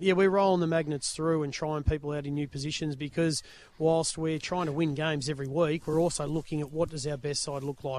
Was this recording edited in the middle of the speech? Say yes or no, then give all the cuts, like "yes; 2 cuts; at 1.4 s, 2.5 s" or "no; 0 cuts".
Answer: no; 0 cuts